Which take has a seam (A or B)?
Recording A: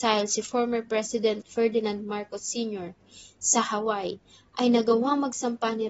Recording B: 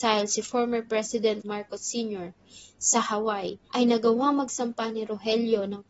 B